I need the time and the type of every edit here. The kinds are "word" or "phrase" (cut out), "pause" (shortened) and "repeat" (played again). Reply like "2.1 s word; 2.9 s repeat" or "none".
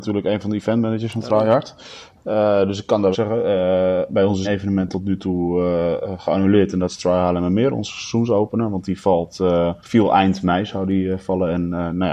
3.1 s phrase; 4.4 s word; 9.8 s pause